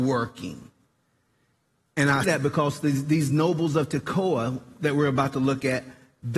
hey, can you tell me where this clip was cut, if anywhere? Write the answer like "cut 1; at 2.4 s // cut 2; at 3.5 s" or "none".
cut 1; at 2.2 s